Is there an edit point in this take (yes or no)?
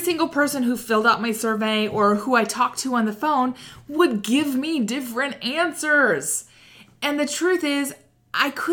no